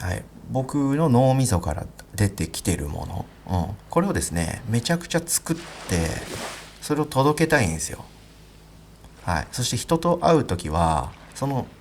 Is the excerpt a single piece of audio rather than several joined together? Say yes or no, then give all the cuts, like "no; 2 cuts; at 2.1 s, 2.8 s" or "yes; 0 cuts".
no; 2 cuts; at 3.8 s, 9.2 s